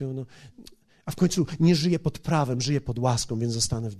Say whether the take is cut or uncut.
uncut